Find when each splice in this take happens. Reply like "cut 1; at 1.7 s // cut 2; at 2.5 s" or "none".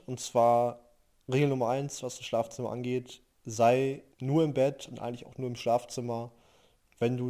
cut 1; at 4.1 s